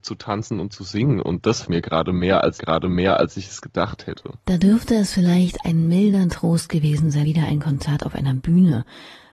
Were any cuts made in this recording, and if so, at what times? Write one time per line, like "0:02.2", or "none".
0:01.6
0:02.6
0:07.2